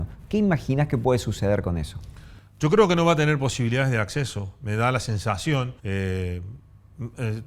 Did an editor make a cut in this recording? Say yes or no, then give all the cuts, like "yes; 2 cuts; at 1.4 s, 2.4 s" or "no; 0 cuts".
yes; 1 cut; at 5.8 s